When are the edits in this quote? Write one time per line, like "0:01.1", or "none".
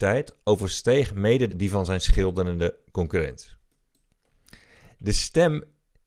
0:01.5

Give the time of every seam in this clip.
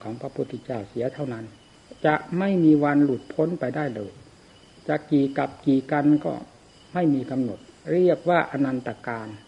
none

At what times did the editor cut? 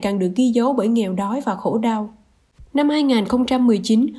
none

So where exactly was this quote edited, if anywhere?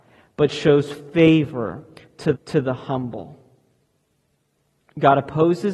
0:02.3

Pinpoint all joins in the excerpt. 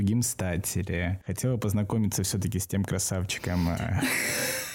none

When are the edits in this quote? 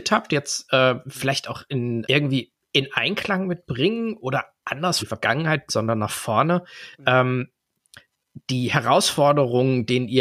0:02.0
0:05.0
0:05.7

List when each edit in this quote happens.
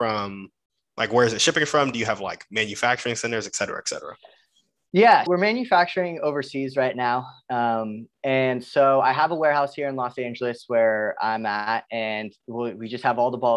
0:05.3

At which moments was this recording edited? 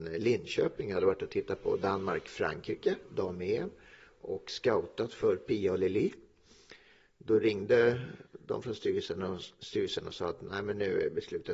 none

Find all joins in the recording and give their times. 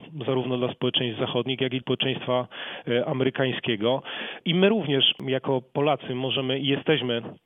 0:01.8

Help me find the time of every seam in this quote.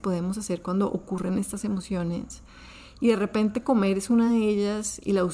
none

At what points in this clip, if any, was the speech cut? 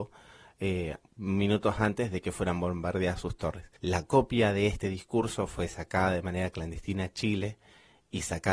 0:03.8

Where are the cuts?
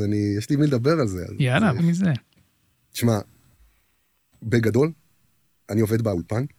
0:01.8

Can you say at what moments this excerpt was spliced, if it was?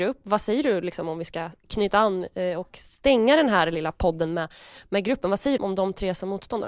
0:05.6

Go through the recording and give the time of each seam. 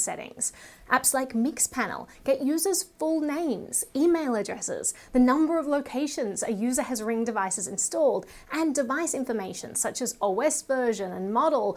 none

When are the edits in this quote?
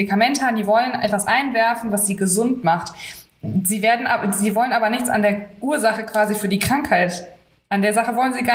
none

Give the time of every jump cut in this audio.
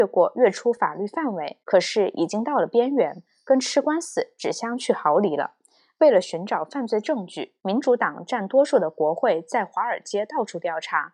0:01.6
0:07.6

